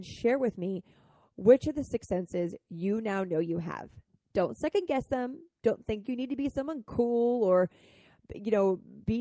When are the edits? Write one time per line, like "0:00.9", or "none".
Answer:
none